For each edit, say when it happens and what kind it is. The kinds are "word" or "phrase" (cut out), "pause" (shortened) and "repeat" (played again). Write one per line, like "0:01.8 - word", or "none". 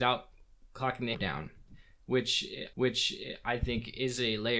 0:01.1 - word
0:02.7 - repeat